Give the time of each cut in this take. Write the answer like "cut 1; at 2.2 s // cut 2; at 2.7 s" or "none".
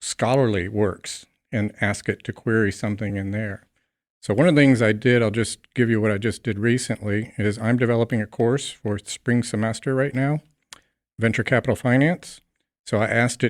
none